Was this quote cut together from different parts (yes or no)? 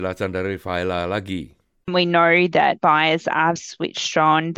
yes